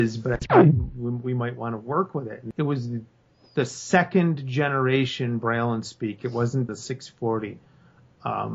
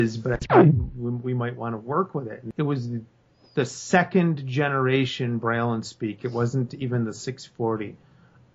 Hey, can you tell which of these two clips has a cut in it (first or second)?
first